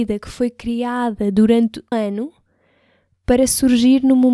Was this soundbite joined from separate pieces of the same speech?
yes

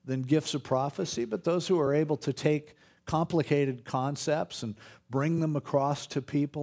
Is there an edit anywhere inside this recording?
no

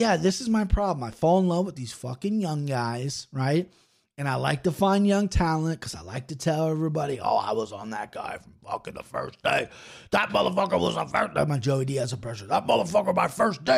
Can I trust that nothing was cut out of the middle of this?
yes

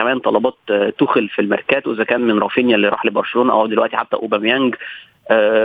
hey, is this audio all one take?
yes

